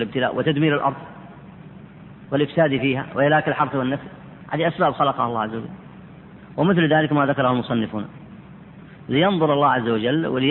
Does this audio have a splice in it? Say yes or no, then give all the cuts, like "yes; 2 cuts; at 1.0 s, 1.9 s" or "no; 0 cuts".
no; 0 cuts